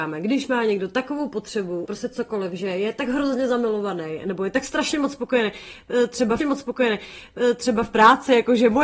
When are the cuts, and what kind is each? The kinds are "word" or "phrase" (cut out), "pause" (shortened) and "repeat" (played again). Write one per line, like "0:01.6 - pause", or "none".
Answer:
0:01.9 - word
0:06.4 - repeat